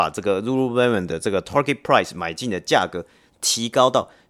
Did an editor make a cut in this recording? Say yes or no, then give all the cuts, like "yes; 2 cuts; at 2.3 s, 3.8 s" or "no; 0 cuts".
no; 0 cuts